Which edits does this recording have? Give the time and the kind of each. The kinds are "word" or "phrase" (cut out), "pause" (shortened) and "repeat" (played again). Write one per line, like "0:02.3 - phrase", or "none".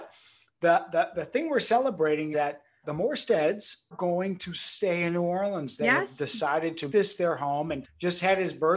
0:01.1 - word
0:02.3 - word
0:02.8 - word
0:03.9 - word
0:06.9 - word
0:07.8 - word